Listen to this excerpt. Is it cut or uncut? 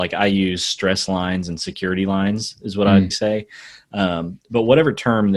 cut